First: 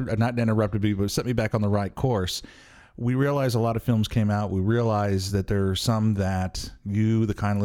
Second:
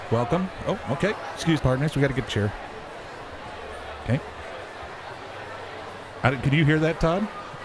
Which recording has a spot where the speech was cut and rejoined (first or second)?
second